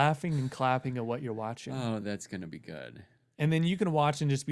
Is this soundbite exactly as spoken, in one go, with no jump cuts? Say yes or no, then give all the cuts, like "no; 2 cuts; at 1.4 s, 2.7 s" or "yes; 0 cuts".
yes; 0 cuts